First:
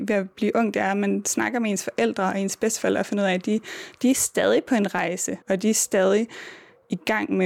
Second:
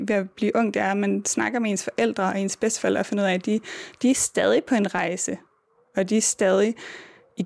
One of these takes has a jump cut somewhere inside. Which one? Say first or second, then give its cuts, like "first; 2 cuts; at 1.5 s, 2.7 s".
first; 1 cut; at 5.4 s